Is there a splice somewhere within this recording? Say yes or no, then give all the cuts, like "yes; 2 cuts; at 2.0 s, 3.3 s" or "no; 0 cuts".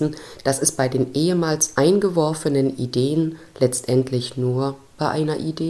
no; 0 cuts